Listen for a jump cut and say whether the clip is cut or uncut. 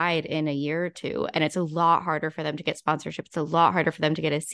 uncut